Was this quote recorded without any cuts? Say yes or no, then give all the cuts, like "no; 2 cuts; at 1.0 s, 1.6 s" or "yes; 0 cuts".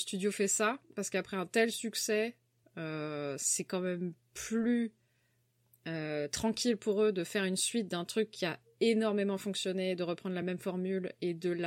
yes; 0 cuts